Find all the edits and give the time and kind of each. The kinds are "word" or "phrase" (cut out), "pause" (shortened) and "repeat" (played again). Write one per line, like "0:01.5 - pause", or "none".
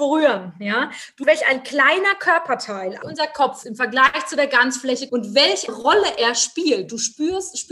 0:01.2 - word
0:03.0 - word
0:03.6 - word
0:05.1 - word
0:05.7 - word